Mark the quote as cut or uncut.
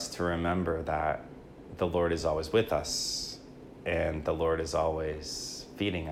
uncut